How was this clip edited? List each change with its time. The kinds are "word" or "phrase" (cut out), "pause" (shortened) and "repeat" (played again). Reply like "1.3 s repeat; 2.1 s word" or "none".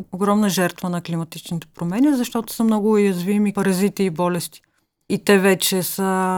3.5 s word

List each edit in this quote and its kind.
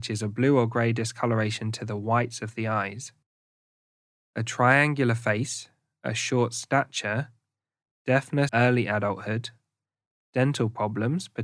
8.5 s word

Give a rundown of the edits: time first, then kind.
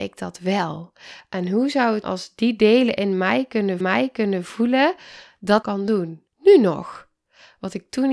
2.0 s word; 3.8 s repeat; 5.6 s phrase; 6.3 s pause

